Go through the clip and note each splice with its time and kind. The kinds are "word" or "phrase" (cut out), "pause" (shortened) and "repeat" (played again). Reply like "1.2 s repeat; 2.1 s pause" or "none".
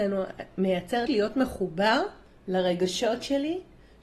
1.1 s phrase